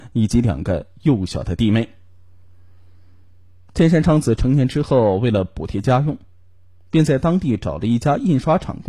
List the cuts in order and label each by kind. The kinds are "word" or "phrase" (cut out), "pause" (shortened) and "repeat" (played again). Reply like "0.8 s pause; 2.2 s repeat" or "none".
none